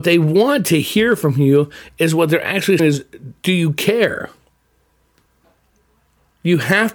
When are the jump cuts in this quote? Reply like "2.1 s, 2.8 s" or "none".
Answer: 2.8 s